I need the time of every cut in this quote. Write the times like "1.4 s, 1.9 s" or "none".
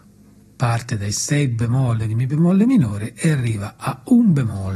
none